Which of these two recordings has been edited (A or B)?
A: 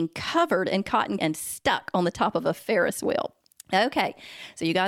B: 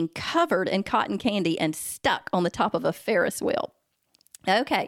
A